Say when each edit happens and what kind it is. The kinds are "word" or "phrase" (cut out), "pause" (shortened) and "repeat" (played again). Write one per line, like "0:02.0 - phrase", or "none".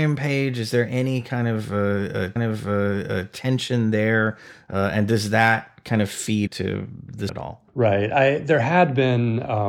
0:02.4 - repeat
0:06.5 - word
0:07.3 - word
0:07.7 - pause